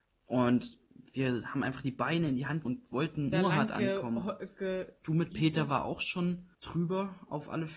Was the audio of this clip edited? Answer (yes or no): yes